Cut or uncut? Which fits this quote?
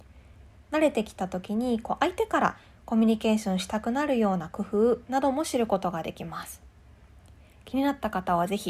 uncut